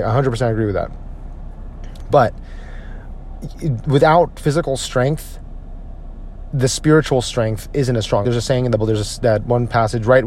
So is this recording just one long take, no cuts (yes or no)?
no